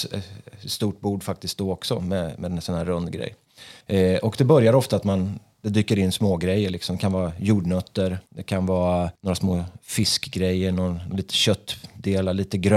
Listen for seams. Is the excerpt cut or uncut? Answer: cut